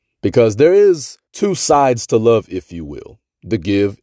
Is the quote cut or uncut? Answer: cut